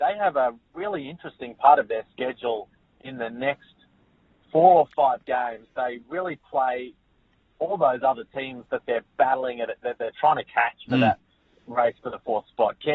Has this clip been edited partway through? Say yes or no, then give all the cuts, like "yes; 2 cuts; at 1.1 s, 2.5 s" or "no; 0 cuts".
no; 0 cuts